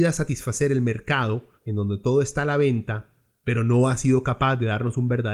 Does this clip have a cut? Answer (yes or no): yes